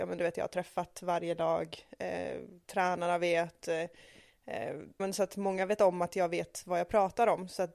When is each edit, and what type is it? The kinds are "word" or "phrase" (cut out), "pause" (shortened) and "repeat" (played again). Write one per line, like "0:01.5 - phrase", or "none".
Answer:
0:05.0 - word